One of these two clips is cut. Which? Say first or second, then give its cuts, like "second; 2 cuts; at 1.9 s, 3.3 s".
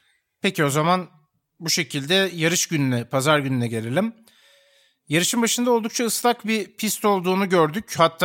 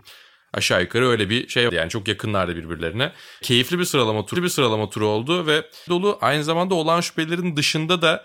second; 3 cuts; at 1.7 s, 4.4 s, 5.9 s